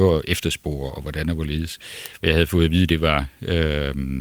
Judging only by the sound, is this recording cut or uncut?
uncut